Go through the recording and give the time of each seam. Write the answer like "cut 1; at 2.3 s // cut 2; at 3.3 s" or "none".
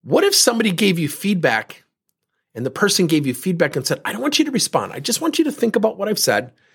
none